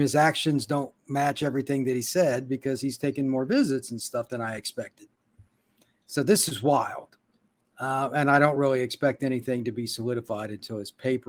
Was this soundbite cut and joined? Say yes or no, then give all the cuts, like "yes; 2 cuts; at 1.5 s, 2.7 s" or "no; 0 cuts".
no; 0 cuts